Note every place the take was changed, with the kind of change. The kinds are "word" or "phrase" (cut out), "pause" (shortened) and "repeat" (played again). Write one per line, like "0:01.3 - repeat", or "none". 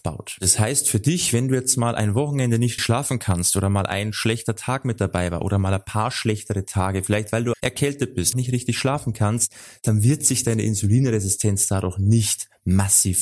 0:02.8 - word
0:07.5 - word
0:08.3 - word